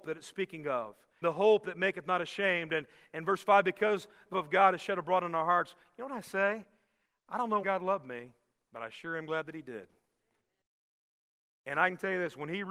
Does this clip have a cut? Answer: yes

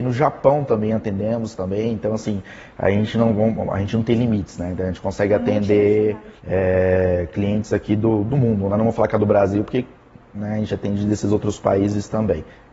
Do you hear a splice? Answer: yes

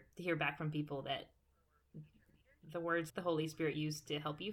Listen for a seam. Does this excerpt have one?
yes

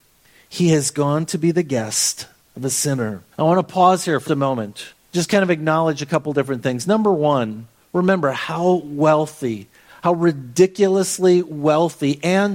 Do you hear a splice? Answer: yes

